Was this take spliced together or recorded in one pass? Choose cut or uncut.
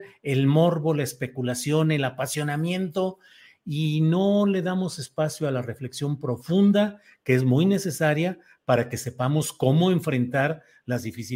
uncut